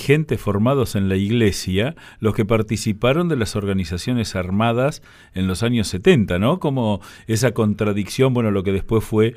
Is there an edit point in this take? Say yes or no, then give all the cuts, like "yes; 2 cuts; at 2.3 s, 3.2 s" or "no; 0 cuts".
no; 0 cuts